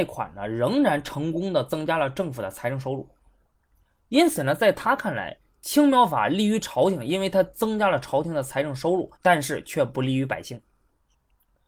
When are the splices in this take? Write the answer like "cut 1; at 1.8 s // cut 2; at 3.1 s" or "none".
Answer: cut 1; at 9.1 s

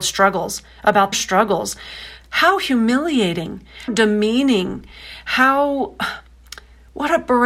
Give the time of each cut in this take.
cut 1; at 1.1 s // cut 2; at 3.9 s

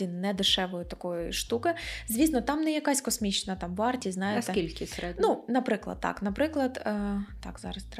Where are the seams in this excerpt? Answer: none

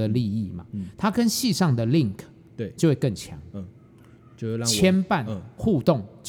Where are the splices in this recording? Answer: none

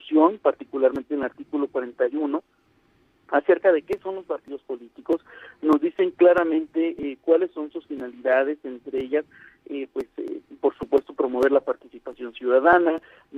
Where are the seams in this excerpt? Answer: none

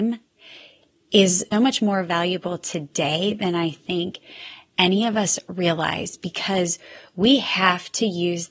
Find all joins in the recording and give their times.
cut 1; at 1.5 s

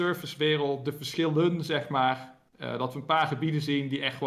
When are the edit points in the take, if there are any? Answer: none

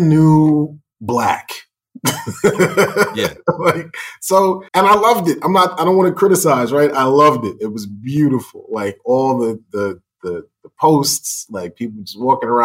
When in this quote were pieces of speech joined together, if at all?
cut 1; at 4.7 s

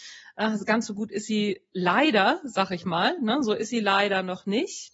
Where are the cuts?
none

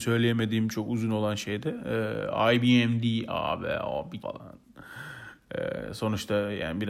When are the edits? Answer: cut 1; at 4.2 s

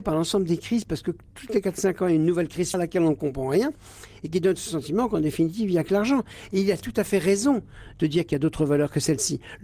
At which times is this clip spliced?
cut 1; at 2.7 s

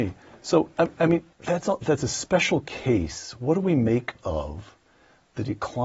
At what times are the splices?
cut 1; at 1.3 s

